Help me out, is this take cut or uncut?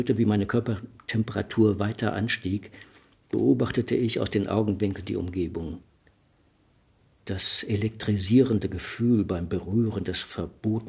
uncut